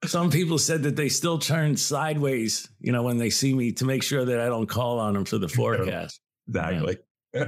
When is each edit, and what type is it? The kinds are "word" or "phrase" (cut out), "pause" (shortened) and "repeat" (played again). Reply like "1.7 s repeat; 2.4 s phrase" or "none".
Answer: none